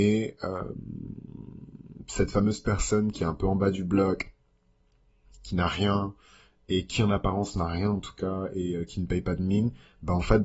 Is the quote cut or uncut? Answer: uncut